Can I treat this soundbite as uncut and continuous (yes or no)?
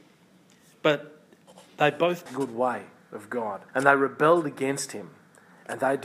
no